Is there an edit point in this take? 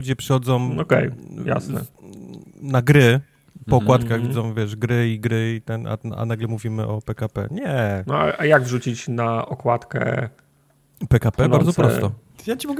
no; 0 cuts

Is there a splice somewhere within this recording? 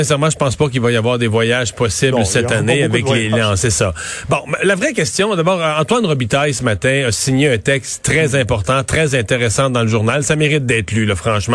no; 0 cuts

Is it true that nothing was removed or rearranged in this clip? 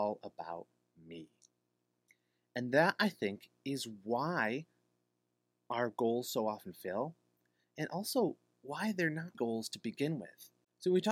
no; 1 cut; at 9.3 s

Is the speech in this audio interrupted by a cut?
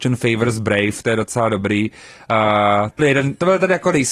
yes; 2 cuts; at 1.0 s, 3.0 s

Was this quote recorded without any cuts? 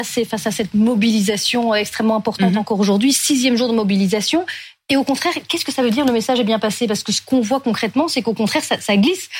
yes; 0 cuts

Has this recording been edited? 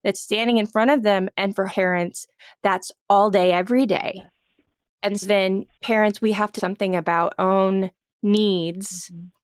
yes; 4 cuts; at 1.7 s, 5.2 s, 6.6 s, 7.4 s

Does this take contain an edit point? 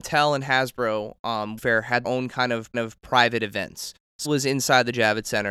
yes; 4 cuts; at 1.6 s, 2.0 s, 2.7 s, 4.2 s

